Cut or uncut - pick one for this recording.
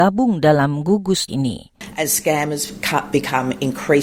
cut